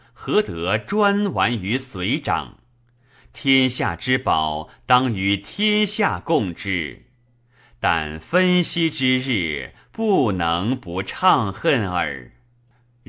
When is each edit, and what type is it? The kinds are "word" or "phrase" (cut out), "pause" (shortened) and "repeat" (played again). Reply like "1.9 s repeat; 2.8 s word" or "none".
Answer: none